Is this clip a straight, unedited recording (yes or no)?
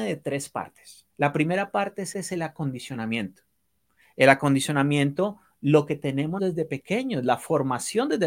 no